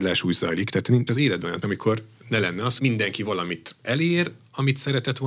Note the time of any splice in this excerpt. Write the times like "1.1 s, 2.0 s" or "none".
1.1 s, 1.6 s, 2.8 s